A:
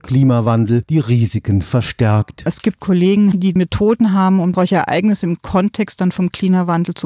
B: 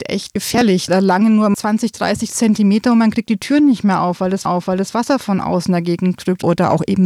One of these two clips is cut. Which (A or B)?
B